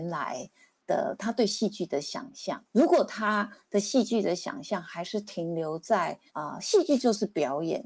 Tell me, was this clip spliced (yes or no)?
yes